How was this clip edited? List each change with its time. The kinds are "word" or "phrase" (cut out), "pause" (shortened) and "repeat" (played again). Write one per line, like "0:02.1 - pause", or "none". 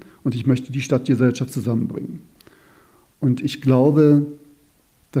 none